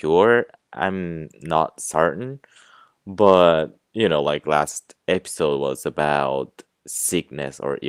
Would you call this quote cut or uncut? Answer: uncut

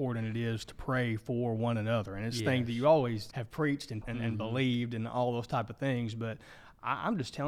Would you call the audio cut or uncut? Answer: cut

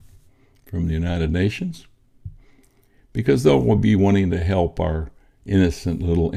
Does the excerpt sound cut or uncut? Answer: uncut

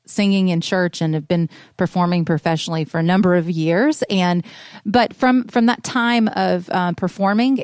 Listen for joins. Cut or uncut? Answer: uncut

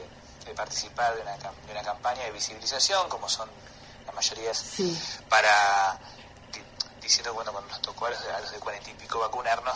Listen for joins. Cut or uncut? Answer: cut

